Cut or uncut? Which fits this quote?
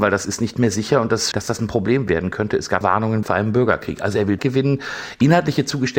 cut